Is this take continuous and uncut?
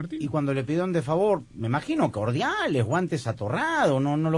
yes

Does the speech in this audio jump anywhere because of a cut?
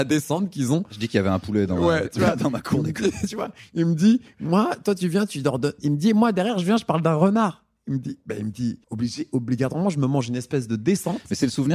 yes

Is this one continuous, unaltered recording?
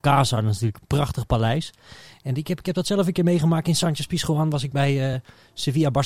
yes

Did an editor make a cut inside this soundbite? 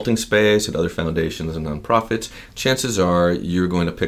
no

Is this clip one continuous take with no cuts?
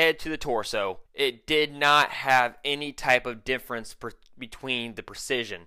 no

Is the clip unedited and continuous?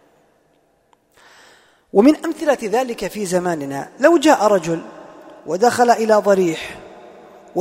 no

